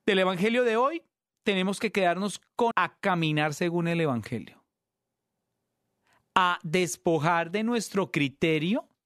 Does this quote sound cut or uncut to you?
cut